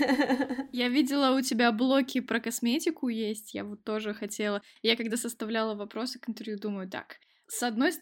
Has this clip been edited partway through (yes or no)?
no